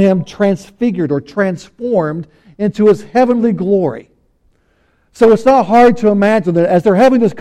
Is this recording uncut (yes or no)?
yes